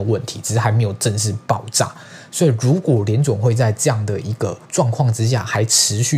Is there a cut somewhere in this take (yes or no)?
yes